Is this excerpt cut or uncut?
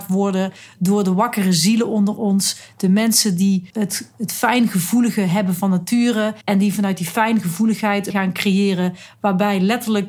cut